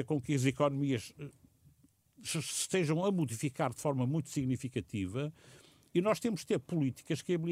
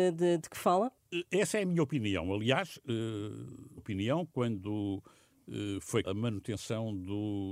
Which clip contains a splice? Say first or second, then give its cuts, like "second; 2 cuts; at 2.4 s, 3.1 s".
second; 2 cuts; at 3.8 s, 6.0 s